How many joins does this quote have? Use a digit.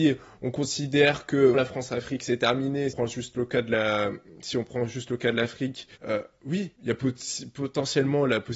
4